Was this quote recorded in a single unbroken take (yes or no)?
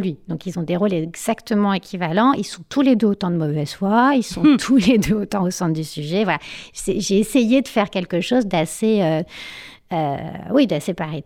yes